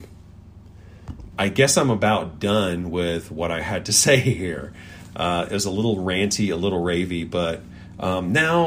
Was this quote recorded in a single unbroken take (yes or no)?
no